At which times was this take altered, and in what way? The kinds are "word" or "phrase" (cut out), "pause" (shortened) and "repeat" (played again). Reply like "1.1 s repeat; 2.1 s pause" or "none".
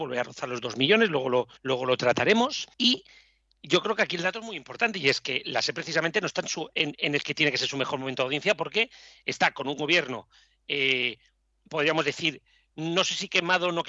1.6 s pause; 2.7 s pause